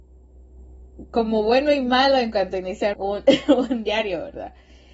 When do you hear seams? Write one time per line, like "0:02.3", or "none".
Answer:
0:02.9